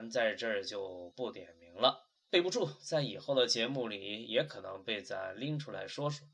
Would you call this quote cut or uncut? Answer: cut